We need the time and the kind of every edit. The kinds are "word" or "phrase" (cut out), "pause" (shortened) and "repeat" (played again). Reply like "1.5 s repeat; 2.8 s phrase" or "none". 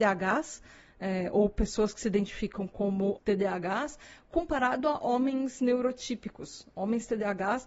3.2 s word